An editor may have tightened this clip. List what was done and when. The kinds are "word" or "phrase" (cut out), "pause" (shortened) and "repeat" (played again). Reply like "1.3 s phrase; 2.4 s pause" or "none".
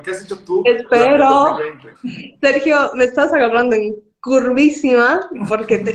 1.9 s pause